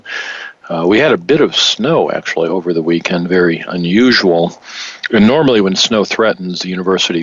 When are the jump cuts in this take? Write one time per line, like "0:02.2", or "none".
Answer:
none

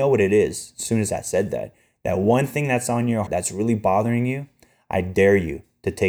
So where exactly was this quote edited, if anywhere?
0:03.3

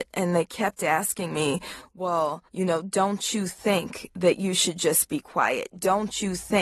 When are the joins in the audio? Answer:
0:02.5

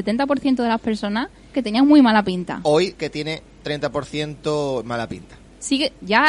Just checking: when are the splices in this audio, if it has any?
0:01.5
0:03.0
0:03.6

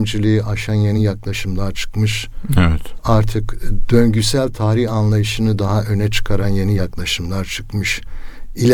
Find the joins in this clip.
none

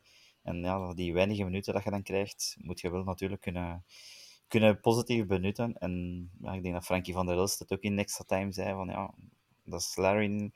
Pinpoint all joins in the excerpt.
none

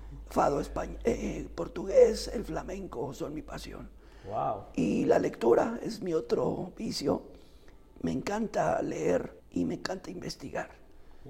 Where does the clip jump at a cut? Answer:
0:09.4

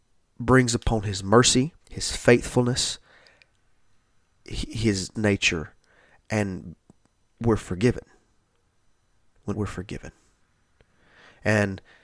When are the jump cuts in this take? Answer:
0:01.8
0:05.1
0:09.5

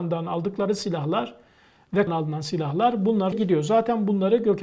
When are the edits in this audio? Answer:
0:02.1
0:03.3

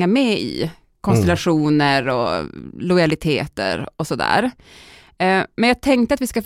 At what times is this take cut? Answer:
none

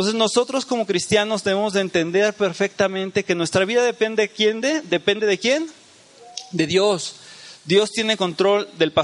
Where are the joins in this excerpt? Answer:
none

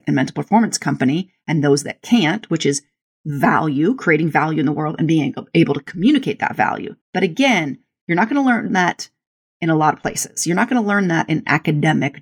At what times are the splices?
0:07.0

